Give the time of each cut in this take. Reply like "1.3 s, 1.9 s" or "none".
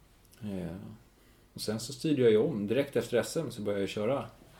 none